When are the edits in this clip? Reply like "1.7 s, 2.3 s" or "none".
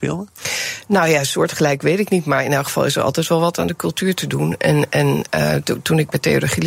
none